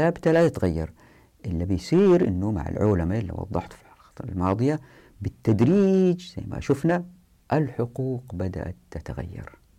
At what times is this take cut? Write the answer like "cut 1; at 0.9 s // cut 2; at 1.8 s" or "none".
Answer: none